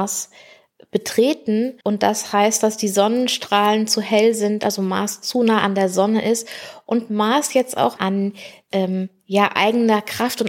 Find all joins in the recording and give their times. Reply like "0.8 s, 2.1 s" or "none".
1.8 s, 8.0 s